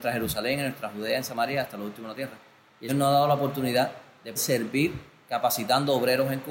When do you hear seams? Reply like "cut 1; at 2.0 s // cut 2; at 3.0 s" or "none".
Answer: cut 1; at 2.9 s // cut 2; at 4.4 s